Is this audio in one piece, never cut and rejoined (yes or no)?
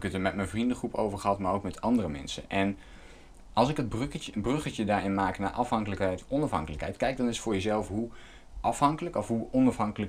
yes